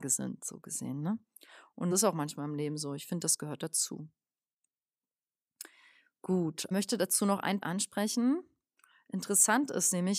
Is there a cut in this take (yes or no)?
yes